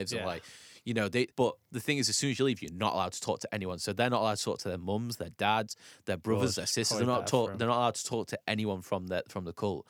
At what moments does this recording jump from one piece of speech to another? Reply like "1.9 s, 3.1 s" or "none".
1.3 s